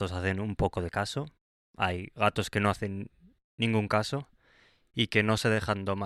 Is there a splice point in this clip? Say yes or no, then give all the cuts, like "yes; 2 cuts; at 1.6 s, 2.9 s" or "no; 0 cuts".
no; 0 cuts